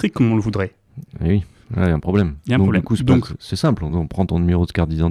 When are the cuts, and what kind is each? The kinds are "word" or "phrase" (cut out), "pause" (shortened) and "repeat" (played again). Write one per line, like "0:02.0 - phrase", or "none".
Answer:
none